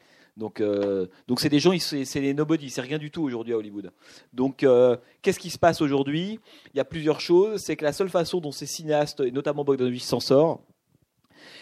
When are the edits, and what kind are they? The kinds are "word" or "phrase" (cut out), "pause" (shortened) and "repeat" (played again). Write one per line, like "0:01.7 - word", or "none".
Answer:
none

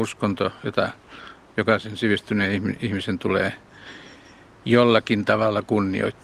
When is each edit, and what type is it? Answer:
none

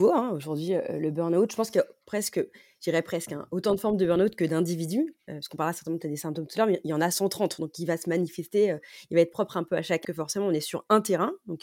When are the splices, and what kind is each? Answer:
0:10.0 - word

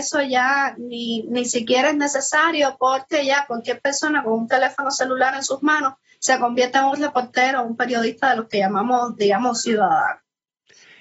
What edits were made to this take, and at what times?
none

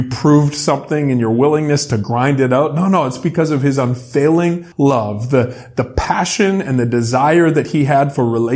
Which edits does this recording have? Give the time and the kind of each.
0:04.7 - pause

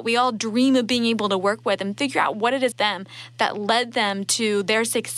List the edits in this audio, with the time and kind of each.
0:02.7 - word

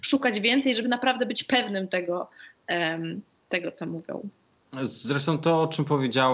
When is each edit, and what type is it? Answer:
none

